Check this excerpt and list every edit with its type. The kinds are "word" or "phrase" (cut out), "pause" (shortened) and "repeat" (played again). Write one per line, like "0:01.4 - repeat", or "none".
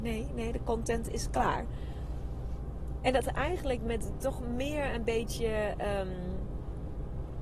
none